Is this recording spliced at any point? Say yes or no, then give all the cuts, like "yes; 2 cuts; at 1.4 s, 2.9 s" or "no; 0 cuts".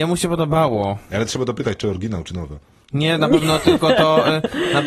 no; 0 cuts